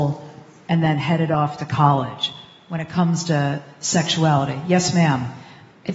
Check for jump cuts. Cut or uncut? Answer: uncut